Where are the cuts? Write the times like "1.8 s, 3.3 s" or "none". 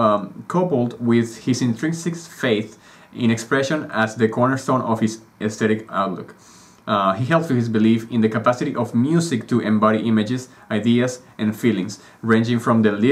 7.5 s